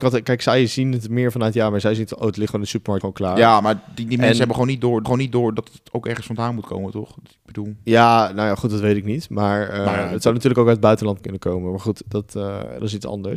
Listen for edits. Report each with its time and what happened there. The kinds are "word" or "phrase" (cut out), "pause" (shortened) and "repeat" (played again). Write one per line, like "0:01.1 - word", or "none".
0:03.0 - word
0:05.0 - repeat
0:11.2 - word